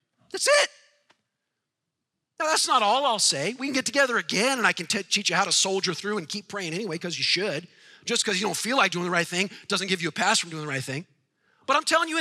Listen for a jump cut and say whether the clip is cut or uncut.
uncut